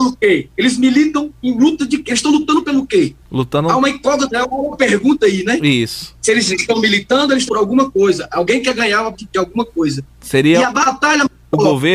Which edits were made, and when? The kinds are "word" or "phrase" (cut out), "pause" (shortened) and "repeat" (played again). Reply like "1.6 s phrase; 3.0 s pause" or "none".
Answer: 1.4 s pause; 3.2 s pause; 7.5 s word; 9.1 s word